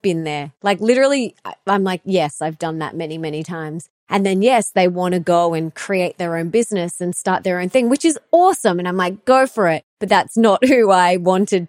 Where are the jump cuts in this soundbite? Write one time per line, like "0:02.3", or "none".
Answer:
0:04.0
0:09.9